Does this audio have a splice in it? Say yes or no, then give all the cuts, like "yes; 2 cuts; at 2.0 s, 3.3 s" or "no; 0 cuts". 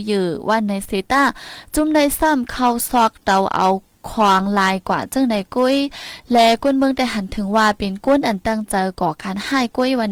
no; 0 cuts